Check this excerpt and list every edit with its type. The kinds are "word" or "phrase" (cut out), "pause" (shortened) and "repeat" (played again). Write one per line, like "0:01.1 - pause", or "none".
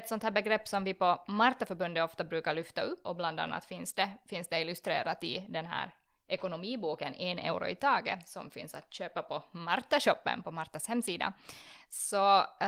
0:03.0 - word